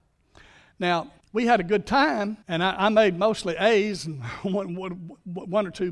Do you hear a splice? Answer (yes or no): yes